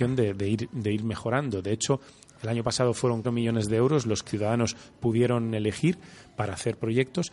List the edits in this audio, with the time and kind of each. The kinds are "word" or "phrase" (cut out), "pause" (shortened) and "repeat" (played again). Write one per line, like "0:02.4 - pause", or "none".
0:03.2 - word
0:04.3 - word